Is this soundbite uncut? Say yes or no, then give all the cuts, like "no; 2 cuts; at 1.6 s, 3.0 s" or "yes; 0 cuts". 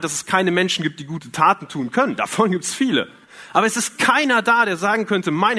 yes; 0 cuts